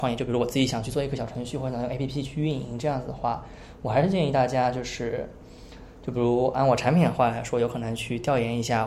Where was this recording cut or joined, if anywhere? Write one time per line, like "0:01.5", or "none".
none

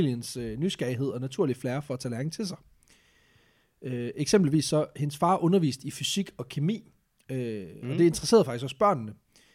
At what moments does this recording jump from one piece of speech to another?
none

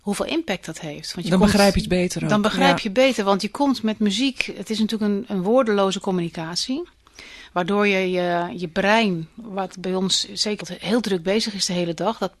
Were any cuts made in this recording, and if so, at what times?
0:10.6

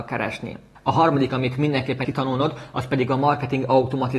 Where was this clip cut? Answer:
0:01.3
0:02.0

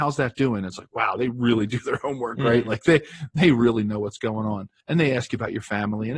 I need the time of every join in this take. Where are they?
0:04.8

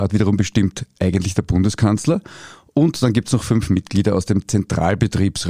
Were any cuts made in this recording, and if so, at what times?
none

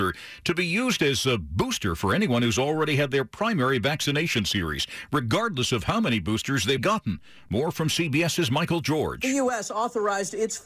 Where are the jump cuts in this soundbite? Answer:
0:06.8

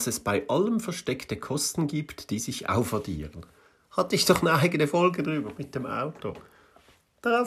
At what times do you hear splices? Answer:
none

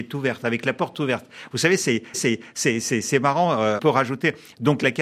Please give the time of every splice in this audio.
0:02.1
0:03.8

